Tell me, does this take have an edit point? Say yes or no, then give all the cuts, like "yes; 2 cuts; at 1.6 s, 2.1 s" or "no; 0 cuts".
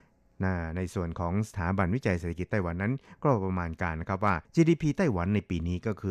yes; 1 cut; at 4.4 s